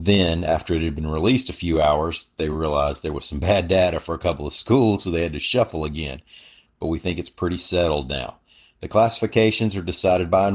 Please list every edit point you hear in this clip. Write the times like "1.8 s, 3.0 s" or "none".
none